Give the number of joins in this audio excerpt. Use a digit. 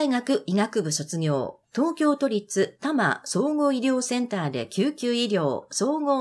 1